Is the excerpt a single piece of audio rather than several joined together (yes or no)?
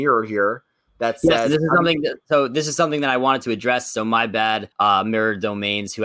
no